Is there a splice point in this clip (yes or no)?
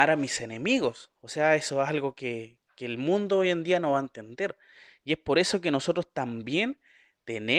no